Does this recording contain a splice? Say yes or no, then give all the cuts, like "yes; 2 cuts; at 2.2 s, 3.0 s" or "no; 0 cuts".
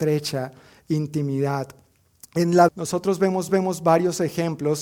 yes; 2 cuts; at 2.7 s, 3.5 s